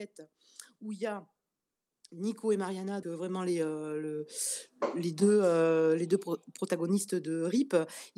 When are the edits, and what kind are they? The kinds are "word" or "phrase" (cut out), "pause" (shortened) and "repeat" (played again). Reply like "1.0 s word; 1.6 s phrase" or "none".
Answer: 3.0 s word